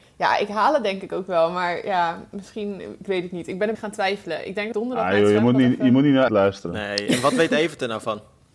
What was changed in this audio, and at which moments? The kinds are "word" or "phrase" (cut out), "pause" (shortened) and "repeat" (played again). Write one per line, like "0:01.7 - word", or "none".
0:03.7 - word
0:04.7 - word
0:06.3 - word